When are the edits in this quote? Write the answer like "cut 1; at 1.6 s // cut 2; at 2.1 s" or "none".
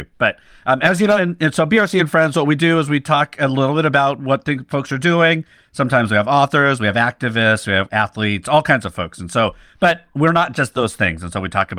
cut 1; at 7.9 s